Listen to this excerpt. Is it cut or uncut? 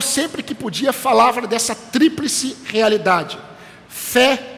uncut